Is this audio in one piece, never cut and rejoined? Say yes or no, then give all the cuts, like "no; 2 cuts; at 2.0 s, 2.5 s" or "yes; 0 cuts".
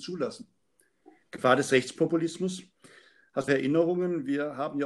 no; 1 cut; at 3.5 s